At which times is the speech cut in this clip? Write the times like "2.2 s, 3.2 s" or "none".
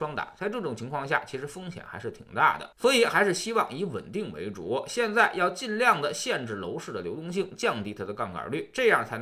2.7 s